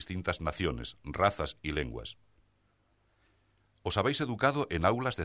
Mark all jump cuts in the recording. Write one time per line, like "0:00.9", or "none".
none

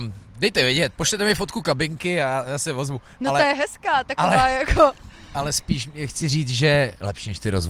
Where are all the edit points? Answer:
none

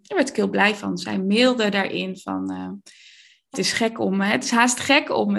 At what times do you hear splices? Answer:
0:03.5

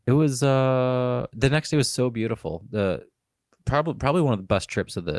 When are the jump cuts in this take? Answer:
none

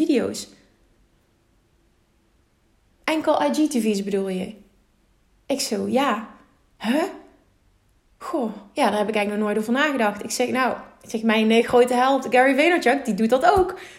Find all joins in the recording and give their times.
none

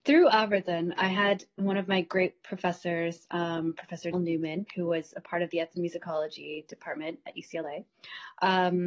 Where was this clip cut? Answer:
0:01.0
0:04.1

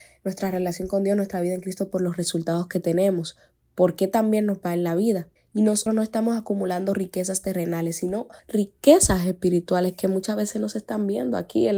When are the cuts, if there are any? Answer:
0:05.4
0:05.9
0:08.4

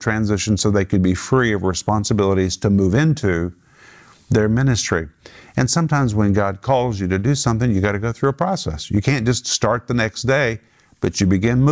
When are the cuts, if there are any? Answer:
none

